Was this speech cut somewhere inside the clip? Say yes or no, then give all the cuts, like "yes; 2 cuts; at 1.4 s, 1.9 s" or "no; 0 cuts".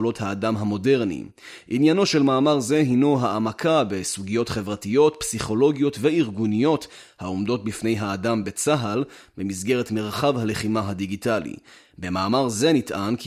no; 0 cuts